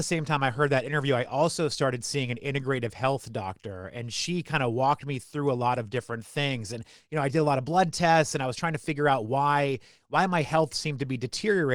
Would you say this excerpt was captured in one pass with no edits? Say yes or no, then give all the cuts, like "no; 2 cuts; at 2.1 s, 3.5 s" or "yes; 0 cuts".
yes; 0 cuts